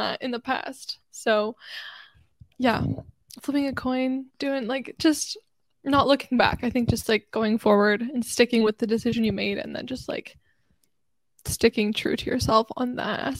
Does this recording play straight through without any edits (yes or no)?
no